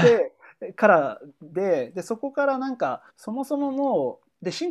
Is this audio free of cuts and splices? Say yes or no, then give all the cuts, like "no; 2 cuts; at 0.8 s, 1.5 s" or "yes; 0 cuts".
no; 1 cut; at 3.1 s